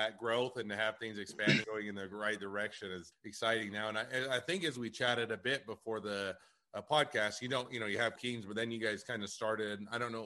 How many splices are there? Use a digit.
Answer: 3